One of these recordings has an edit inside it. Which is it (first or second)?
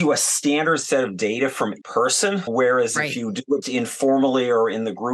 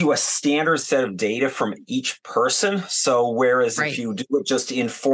first